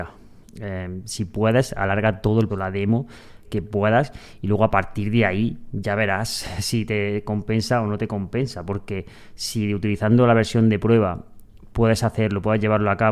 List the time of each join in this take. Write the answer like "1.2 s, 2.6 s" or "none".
2.5 s, 3.4 s